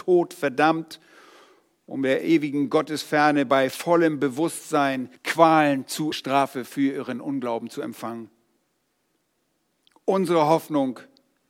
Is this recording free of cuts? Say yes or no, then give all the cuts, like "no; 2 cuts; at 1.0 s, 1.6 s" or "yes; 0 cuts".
no; 2 cuts; at 5.2 s, 6.1 s